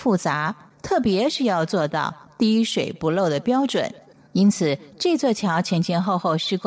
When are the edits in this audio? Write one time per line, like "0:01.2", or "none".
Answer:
none